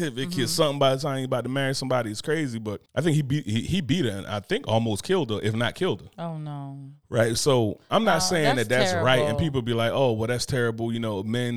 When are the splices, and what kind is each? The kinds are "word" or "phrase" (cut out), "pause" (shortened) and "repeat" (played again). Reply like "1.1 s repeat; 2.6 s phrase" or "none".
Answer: 2.9 s pause